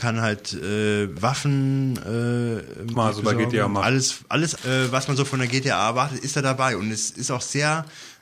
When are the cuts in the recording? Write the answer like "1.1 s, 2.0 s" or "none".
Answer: 2.9 s, 4.6 s